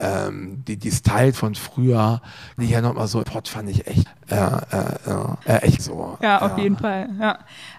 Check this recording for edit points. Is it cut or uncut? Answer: cut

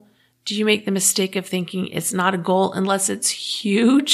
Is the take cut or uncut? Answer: uncut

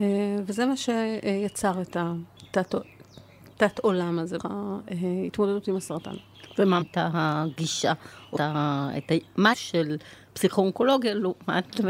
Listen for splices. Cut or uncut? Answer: cut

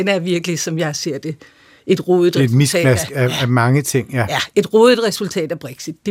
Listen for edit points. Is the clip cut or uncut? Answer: uncut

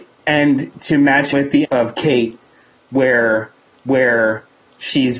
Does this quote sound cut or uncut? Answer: cut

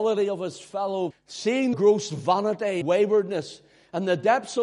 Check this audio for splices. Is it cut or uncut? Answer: cut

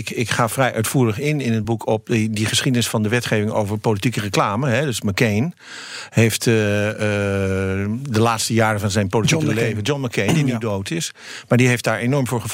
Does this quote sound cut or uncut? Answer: uncut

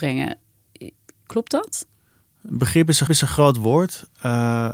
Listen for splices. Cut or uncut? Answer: cut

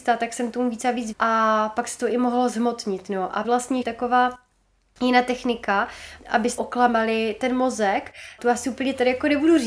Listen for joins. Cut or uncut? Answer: cut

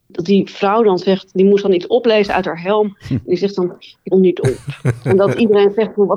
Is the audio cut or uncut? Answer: cut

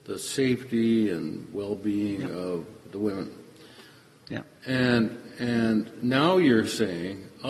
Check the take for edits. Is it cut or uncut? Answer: uncut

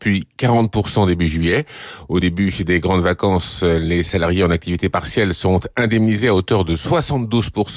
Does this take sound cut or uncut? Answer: uncut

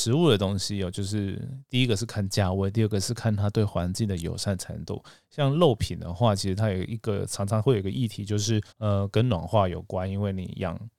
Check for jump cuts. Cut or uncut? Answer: cut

